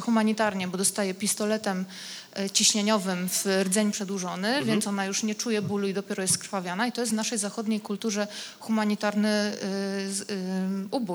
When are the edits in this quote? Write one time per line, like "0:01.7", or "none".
none

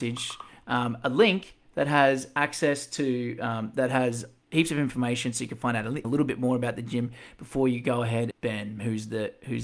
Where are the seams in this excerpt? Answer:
0:06.0
0:08.3

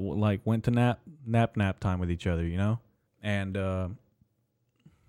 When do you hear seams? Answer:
0:03.1

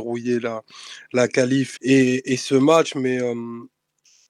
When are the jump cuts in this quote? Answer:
0:01.8

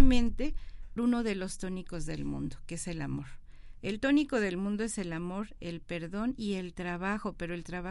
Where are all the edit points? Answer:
0:01.0

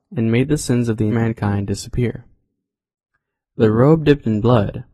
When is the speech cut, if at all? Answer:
0:01.1

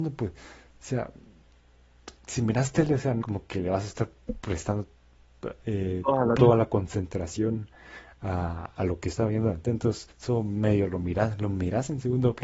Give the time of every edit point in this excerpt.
0:02.2
0:03.2
0:06.4
0:10.1

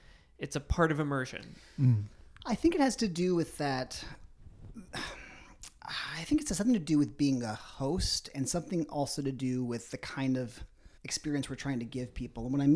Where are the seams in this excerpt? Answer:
0:11.0

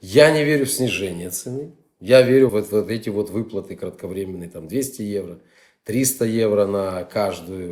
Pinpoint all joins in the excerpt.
0:02.5

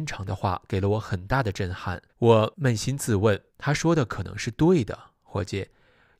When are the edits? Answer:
0:02.1
0:03.5

